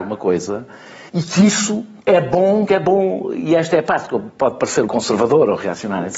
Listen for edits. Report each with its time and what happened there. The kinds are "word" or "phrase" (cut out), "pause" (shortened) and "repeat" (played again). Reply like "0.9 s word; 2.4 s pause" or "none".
1.1 s pause; 2.0 s pause; 2.7 s word; 4.9 s word